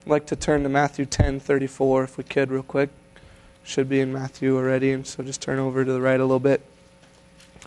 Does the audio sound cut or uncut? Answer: uncut